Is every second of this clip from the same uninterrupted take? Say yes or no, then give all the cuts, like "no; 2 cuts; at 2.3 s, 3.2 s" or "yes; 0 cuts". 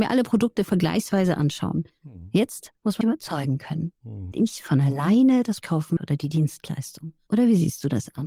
no; 4 cuts; at 3.0 s, 4.3 s, 5.6 s, 6.0 s